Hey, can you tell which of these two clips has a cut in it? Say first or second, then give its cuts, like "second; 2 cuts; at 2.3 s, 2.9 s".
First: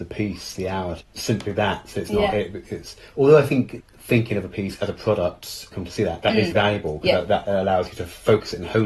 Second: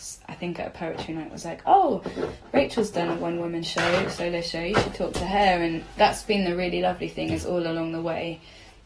first; 4 cuts; at 1.0 s, 3.8 s, 5.7 s, 6.5 s